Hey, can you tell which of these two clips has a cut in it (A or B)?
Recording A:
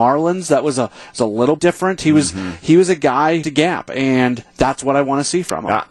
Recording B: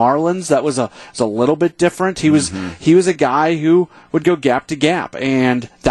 A